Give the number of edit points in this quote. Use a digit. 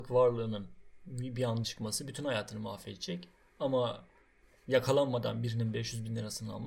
1